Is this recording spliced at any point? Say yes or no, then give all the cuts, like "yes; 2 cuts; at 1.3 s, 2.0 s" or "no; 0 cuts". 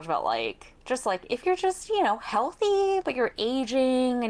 no; 0 cuts